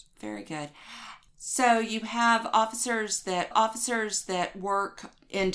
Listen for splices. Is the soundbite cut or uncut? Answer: cut